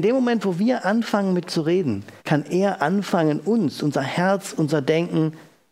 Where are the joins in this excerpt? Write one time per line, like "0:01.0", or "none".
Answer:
0:01.4
0:02.2

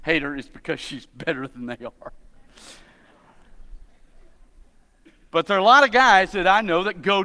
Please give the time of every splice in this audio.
none

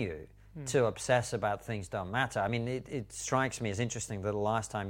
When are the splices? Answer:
none

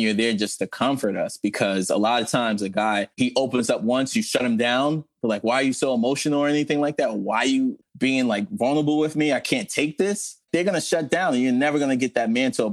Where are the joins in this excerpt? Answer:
0:03.1
0:10.4

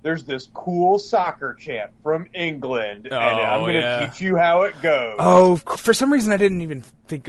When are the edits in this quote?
0:05.8

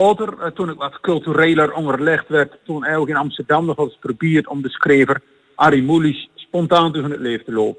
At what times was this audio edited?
none

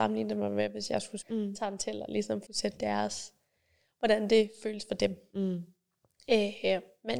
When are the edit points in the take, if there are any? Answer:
0:01.2
0:02.5
0:02.8

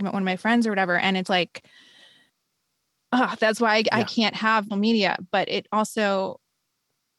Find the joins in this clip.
0:01.3
0:04.7

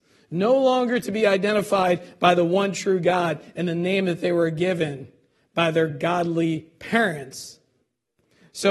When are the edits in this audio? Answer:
none

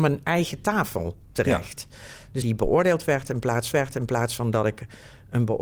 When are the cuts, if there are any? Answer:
0:02.4
0:03.7

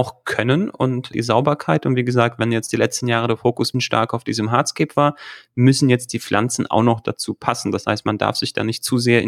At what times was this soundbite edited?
0:01.1
0:03.7

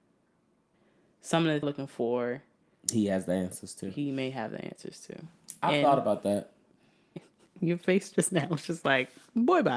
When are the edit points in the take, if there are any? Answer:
0:01.6

